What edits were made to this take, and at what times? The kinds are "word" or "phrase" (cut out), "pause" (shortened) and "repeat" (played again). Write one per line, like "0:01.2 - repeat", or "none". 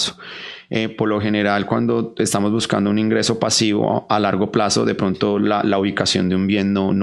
none

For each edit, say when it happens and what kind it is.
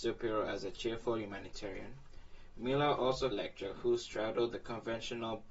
0:03.3 - phrase

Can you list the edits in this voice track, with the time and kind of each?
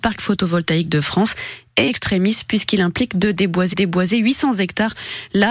0:01.9 - word
0:03.7 - repeat

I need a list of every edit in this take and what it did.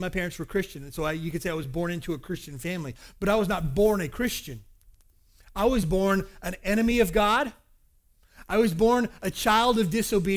none

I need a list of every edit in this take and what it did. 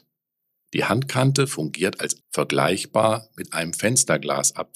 0:02.2 - word

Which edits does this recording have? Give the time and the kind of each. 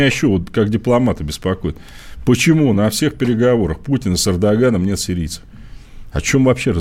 none

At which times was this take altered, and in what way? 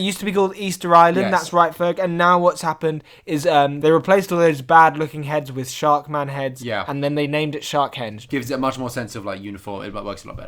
none

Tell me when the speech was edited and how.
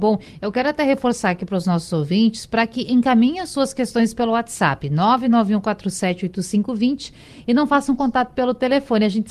none

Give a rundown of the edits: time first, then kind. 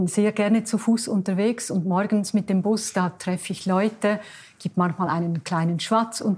none

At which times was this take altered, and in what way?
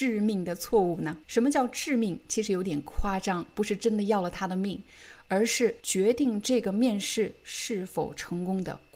0:01.2 - pause
0:05.8 - pause

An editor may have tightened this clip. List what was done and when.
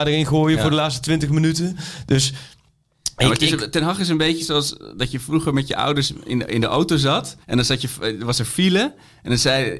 0:07.4 - pause

